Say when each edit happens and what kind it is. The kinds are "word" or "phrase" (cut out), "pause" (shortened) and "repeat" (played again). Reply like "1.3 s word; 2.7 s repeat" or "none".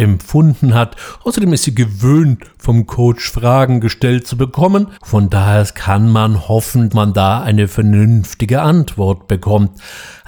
5.0 s pause; 6.9 s word